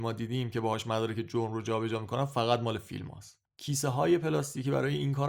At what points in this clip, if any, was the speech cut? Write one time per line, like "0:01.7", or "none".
0:03.4